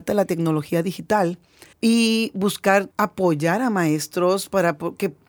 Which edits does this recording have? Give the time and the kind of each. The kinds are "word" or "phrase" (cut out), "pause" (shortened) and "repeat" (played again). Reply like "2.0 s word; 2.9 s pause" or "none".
1.7 s pause; 2.9 s pause